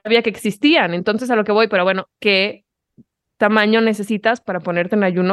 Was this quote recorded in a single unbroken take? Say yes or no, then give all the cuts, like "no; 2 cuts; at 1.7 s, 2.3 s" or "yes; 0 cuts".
yes; 0 cuts